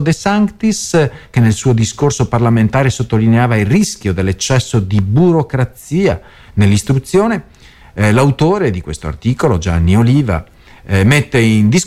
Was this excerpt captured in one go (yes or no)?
yes